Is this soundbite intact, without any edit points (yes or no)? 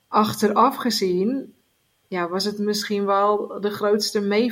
yes